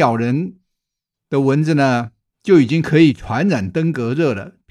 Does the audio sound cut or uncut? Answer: uncut